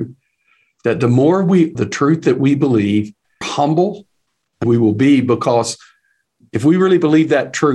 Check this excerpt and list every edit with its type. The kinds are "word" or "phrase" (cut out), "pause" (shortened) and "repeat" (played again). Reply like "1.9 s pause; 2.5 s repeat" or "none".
1.7 s phrase; 3.4 s phrase; 4.6 s phrase